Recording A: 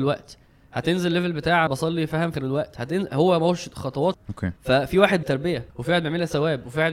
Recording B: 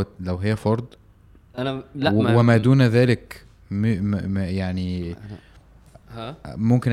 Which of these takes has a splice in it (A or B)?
A